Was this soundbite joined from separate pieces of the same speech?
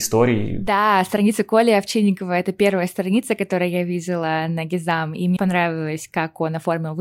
yes; 1 cut; at 5.4 s

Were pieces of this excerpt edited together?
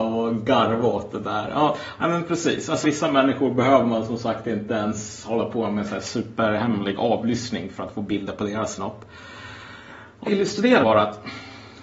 yes; 3 cuts; at 2.8 s, 10.3 s, 10.8 s

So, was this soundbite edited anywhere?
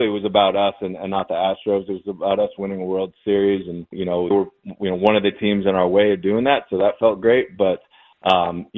yes; 2 cuts; at 3.9 s, 4.3 s

